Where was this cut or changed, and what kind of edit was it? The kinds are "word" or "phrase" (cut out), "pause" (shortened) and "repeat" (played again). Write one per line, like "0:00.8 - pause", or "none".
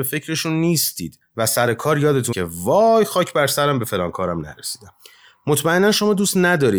0:02.3 - word